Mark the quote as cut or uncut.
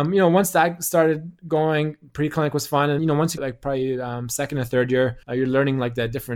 cut